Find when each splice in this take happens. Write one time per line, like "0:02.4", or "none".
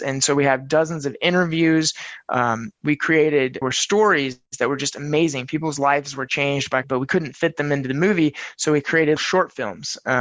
0:03.6
0:04.5
0:06.8
0:09.2